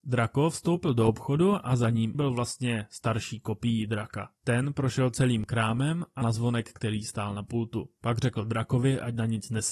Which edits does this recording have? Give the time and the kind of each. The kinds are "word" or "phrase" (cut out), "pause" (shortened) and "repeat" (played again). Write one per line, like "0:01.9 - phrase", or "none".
0:02.1 - phrase
0:04.4 - pause
0:06.2 - word